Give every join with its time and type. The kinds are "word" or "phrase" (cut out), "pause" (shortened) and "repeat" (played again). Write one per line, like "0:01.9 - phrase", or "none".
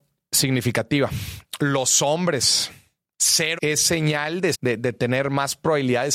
0:03.6 - word
0:04.5 - word